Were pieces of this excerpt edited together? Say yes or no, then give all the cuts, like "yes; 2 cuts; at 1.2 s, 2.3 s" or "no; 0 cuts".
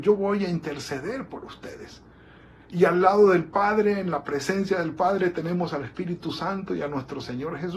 no; 0 cuts